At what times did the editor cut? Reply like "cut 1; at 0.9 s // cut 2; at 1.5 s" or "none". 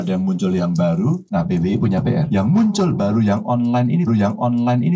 cut 1; at 4.1 s